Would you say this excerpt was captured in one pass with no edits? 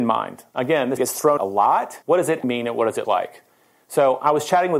no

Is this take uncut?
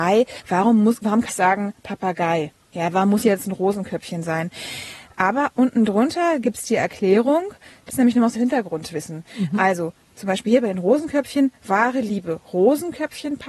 no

